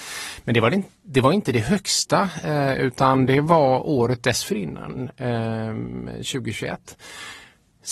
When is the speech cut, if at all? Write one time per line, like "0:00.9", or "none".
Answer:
none

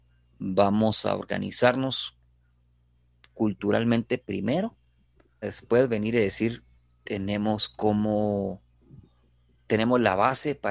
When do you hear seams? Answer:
0:05.4
0:06.8

